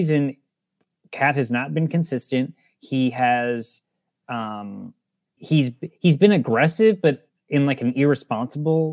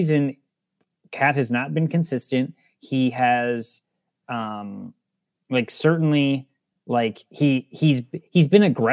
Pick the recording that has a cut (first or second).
first